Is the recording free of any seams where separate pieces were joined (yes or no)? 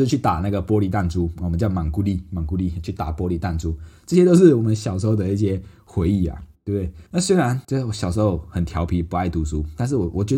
no